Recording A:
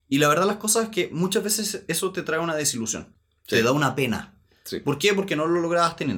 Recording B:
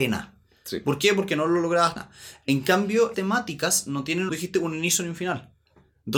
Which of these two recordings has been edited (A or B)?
B